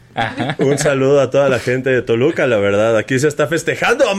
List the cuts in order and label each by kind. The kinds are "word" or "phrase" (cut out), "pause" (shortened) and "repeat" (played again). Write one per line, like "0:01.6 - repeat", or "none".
none